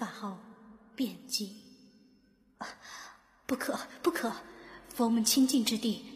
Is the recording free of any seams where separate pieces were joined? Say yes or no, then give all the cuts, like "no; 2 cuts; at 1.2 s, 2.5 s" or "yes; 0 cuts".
yes; 0 cuts